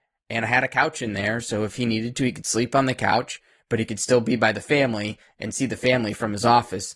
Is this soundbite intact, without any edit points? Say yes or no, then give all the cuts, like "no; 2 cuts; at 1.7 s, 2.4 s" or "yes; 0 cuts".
yes; 0 cuts